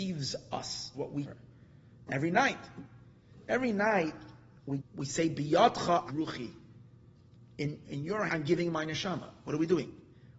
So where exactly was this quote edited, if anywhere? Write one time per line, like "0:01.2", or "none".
0:00.9
0:01.2
0:04.8
0:06.1
0:07.8
0:08.3